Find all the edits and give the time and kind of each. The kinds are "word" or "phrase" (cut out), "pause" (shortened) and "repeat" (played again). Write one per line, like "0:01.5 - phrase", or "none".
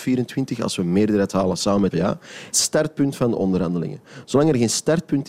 0:01.9 - word
0:02.5 - phrase